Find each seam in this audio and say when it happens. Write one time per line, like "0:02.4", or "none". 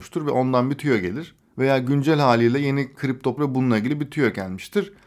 0:01.4
0:03.0
0:03.4